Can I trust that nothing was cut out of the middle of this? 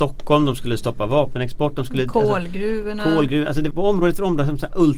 no; 1 cut; at 3.7 s

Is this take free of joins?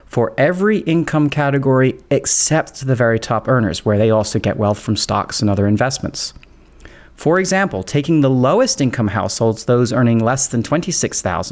yes; 0 cuts

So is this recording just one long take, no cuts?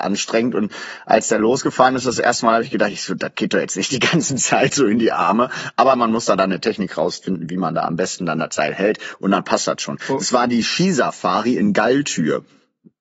yes; 0 cuts

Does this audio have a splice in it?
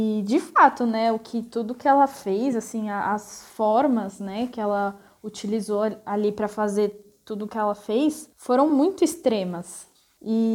no; 0 cuts

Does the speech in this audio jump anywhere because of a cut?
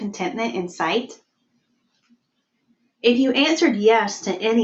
no; 0 cuts

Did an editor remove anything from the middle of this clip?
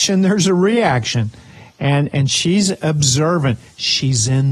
no; 0 cuts

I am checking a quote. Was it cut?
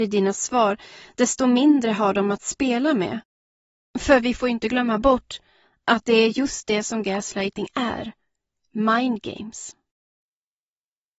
no; 0 cuts

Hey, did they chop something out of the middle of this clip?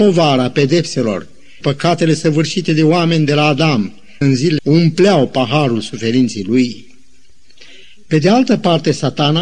yes; 3 cuts; at 1.6 s, 4.2 s, 4.6 s

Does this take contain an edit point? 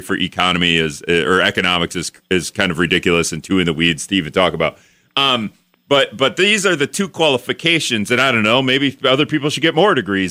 no; 0 cuts

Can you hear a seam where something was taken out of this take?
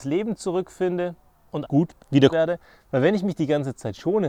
yes; 3 cuts; at 1.6 s, 2.0 s, 2.3 s

